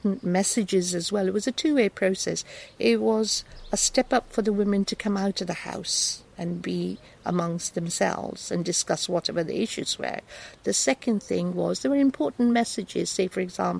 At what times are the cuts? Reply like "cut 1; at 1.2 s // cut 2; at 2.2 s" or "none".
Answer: none